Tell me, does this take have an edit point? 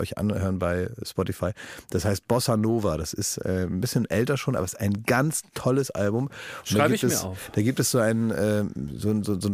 no; 0 cuts

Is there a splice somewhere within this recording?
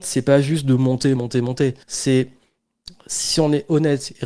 yes; 2 cuts; at 1.1 s, 1.8 s

